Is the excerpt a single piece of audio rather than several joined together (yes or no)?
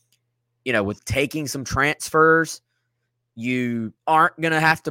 no